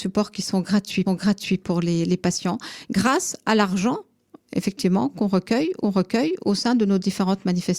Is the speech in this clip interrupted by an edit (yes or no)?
yes